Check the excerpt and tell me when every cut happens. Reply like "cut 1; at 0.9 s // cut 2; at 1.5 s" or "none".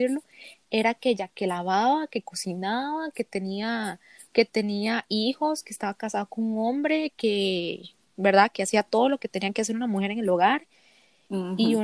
none